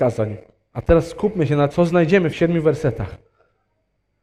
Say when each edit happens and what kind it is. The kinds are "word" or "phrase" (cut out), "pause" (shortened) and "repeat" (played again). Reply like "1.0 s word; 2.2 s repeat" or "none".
1.7 s word; 2.3 s phrase